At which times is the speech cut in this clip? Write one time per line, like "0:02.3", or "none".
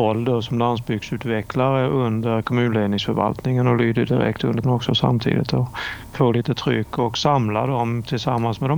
0:04.6
0:06.1